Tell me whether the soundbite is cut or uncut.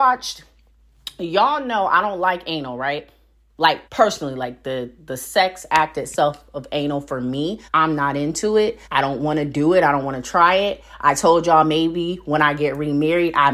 cut